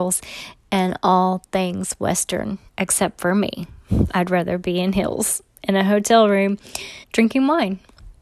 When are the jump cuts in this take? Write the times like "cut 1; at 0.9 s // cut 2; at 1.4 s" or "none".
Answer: cut 1; at 2.7 s // cut 2; at 7.0 s